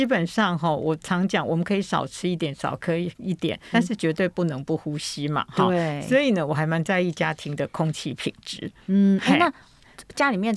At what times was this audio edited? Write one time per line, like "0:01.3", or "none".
0:03.7